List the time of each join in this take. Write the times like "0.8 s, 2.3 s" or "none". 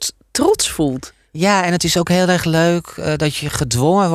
none